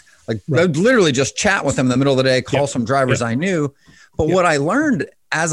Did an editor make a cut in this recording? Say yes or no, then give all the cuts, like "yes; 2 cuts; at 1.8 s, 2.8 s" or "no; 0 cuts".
no; 0 cuts